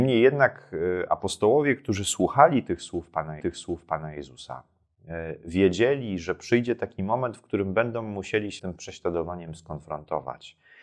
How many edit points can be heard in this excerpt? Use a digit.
2